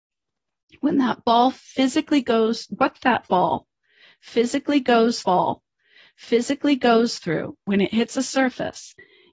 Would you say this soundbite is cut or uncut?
cut